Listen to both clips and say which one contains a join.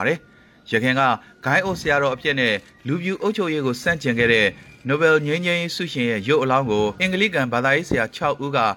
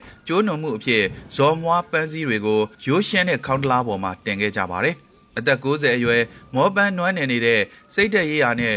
second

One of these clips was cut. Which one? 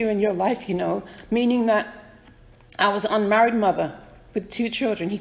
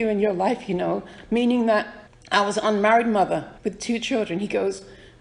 second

